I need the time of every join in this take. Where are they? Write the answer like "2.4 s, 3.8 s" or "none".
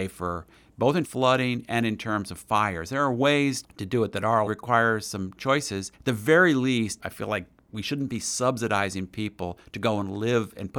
1.0 s, 3.6 s, 4.5 s, 5.9 s, 7.0 s